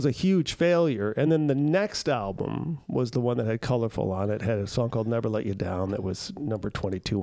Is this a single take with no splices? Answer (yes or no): yes